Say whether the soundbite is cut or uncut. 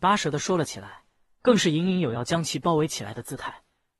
uncut